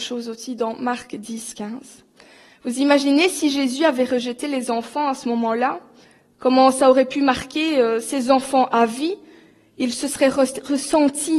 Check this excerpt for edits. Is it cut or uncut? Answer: uncut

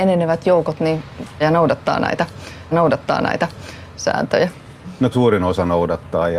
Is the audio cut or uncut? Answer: cut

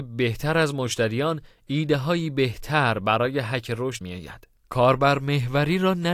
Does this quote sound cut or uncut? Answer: cut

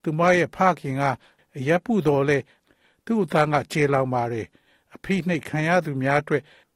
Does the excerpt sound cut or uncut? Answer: uncut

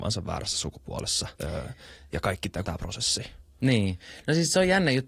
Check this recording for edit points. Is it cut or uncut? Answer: cut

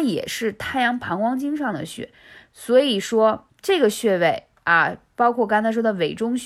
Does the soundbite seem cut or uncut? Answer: cut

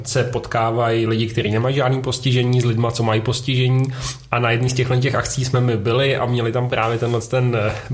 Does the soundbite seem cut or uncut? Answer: uncut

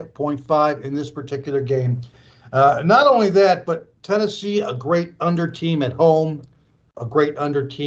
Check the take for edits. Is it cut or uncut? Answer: cut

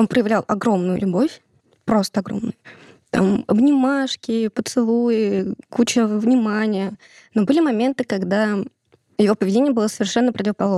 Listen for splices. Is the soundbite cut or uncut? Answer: uncut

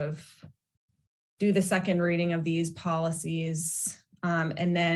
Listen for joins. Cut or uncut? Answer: uncut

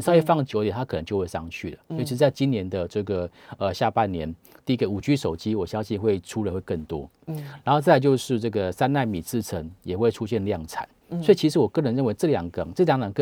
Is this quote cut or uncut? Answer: uncut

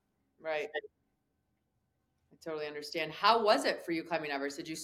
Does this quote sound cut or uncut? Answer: uncut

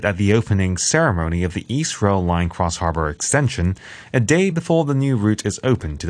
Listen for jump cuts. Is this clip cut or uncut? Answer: uncut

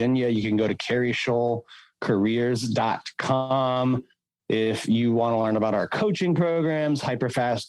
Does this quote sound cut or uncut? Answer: uncut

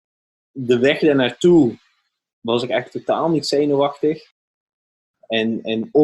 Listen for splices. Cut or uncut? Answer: uncut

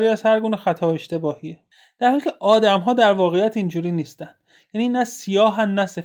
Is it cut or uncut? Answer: uncut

